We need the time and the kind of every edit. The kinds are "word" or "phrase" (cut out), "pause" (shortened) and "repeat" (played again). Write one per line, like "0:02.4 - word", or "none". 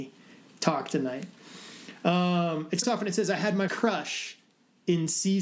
0:02.8 - word
0:03.7 - word